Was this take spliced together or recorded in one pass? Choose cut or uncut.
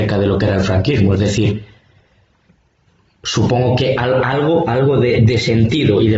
uncut